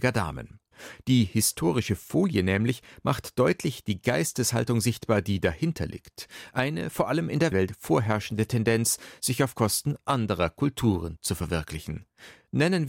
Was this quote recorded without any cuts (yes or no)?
no